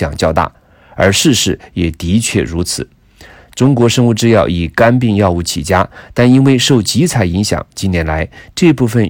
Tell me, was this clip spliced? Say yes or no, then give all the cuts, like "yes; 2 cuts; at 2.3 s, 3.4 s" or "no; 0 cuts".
no; 0 cuts